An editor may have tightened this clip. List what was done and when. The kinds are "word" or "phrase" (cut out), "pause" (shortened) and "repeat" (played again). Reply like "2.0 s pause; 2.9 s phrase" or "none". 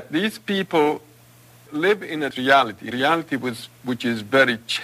1.7 s word; 2.3 s word; 2.9 s word